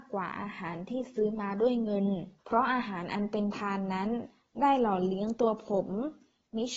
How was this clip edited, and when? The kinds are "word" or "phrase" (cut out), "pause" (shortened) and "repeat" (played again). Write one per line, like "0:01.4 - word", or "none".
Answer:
0:02.4 - pause